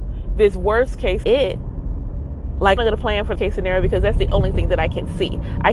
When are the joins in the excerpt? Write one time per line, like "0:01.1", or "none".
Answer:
0:01.2
0:02.8
0:03.4